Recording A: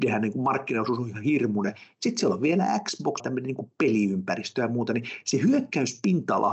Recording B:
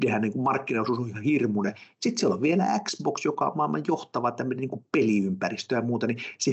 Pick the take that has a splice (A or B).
A